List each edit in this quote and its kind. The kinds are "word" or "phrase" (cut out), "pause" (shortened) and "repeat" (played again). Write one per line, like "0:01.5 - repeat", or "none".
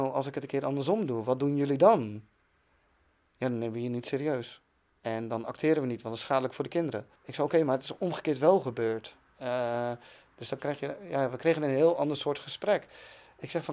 0:07.2 - pause